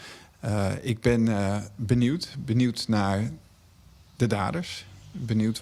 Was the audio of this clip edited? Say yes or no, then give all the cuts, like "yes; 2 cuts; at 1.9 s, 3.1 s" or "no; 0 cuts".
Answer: no; 0 cuts